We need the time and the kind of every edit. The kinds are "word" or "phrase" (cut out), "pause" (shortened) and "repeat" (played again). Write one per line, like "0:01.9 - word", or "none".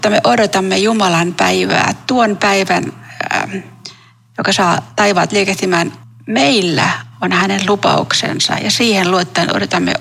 0:06.0 - pause